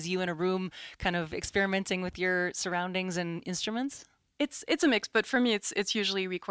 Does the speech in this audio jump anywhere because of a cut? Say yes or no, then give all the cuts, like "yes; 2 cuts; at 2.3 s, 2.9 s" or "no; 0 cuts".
no; 0 cuts